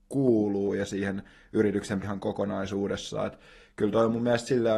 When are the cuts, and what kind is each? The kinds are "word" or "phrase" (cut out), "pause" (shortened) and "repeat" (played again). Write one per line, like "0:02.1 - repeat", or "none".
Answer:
0:02.0 - word